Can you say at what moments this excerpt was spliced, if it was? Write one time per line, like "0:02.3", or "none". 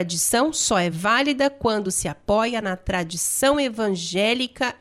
none

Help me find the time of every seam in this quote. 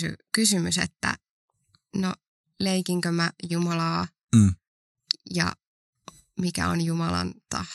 none

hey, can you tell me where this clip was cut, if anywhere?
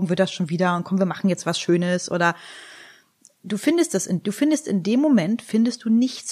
none

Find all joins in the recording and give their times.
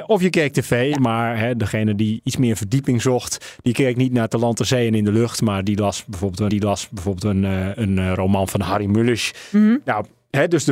0:06.5

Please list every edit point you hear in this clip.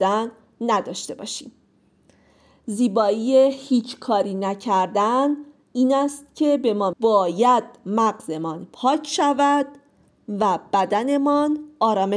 0:06.9

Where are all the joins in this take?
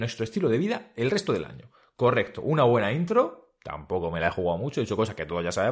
none

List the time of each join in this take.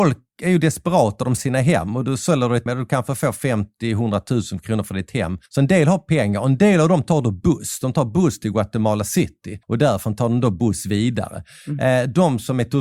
0:01.4
0:02.7
0:05.5
0:09.6

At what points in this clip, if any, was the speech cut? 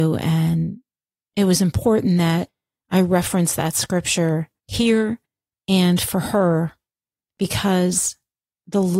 0:04.6

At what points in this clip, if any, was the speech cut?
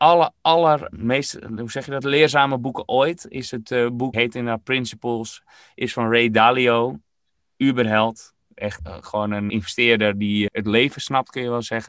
0:00.9
0:02.0
0:04.1
0:08.8
0:09.5
0:10.5

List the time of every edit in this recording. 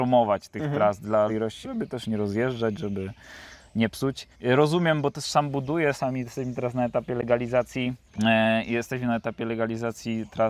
0:01.3
0:01.6
0:04.3
0:05.9
0:08.1

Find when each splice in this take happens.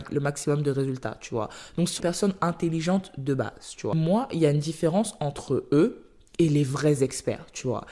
0:02.0

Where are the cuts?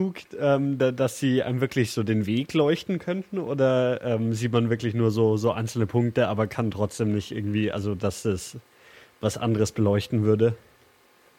none

